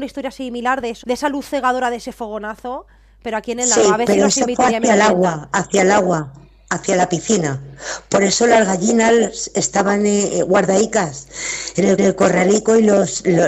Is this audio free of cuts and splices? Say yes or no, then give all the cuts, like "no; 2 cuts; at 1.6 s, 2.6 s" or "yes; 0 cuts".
no; 2 cuts; at 1.0 s, 12.0 s